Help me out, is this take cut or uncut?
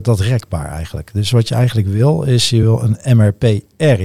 uncut